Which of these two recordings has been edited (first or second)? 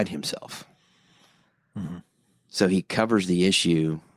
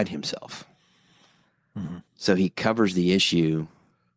second